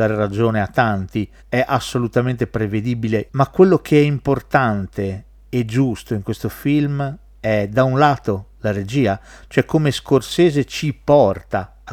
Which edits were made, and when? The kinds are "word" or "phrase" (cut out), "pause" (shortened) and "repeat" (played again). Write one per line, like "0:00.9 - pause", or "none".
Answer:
0:01.4 - pause